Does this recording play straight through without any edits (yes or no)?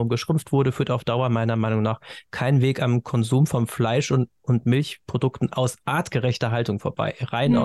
yes